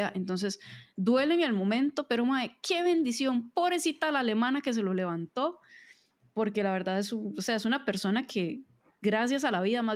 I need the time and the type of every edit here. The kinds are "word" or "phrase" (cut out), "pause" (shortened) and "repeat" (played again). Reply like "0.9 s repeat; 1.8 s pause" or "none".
none